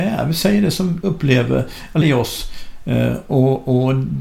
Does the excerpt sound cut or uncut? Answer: cut